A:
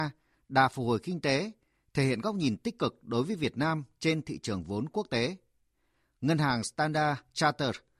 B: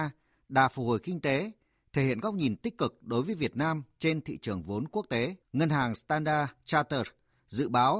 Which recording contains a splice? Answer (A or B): B